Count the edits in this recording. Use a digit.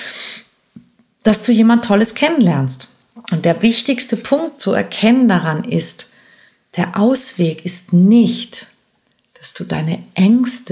1